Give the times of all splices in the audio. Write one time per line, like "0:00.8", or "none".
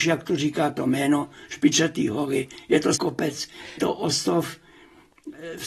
0:03.0
0:03.8